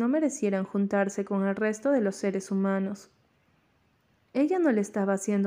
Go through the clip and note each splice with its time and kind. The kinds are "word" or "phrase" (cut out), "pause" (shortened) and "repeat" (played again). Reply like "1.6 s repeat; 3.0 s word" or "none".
none